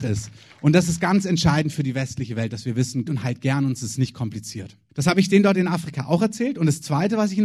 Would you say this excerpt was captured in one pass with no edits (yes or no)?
no